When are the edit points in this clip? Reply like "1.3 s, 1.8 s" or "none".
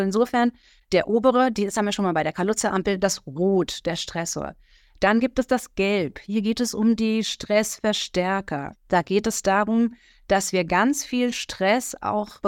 none